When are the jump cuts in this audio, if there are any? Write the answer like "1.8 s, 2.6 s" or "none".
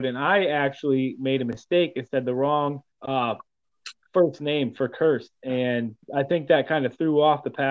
2.9 s, 6.0 s